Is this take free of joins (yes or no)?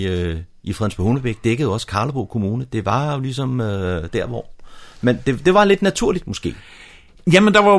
yes